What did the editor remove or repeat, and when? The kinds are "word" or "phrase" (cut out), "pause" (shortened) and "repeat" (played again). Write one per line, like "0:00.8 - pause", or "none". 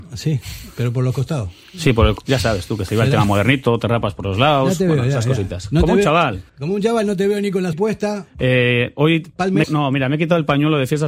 0:06.5 - pause
0:07.7 - word
0:09.6 - word